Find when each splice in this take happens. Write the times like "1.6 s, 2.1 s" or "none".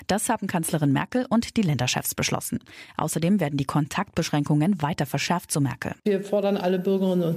6.0 s